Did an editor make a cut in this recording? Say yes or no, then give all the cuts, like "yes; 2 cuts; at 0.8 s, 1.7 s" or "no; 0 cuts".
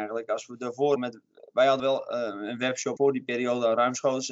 yes; 3 cuts; at 1.0 s, 1.8 s, 3.0 s